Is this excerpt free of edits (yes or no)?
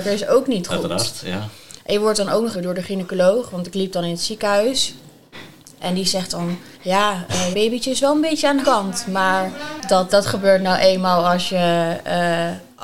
no